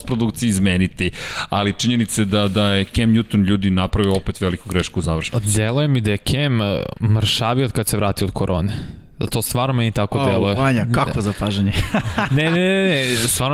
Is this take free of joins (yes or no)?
yes